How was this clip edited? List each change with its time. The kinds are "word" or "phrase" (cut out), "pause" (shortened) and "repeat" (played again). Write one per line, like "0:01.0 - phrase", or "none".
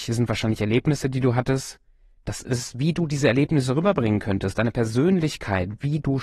none